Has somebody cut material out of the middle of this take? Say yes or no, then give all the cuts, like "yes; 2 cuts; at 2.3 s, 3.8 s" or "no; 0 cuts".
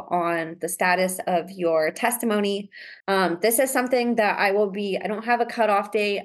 yes; 1 cut; at 3.0 s